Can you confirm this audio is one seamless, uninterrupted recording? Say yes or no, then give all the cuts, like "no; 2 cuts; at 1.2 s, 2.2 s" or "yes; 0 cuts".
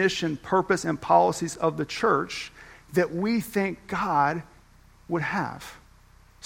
yes; 0 cuts